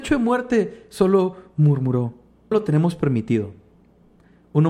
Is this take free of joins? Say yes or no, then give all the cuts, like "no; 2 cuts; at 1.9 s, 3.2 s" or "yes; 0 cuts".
no; 1 cut; at 2.5 s